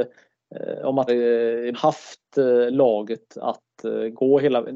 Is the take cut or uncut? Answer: cut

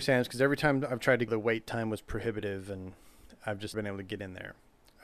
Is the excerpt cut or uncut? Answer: cut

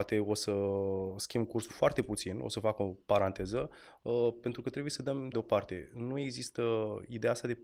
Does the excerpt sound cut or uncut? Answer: cut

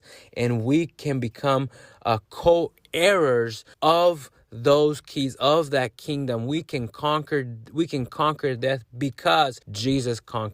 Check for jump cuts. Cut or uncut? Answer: cut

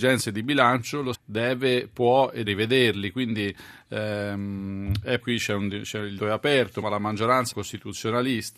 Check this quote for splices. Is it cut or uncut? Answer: cut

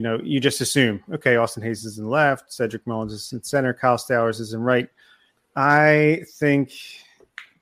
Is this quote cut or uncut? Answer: uncut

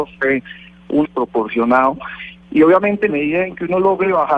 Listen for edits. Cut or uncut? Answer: cut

